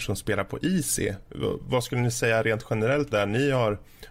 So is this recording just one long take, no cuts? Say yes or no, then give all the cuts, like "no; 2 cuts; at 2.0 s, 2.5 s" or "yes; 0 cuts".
no; 1 cut; at 3.1 s